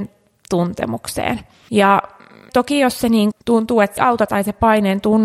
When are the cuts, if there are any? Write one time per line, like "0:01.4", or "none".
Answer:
0:03.3
0:04.0
0:04.3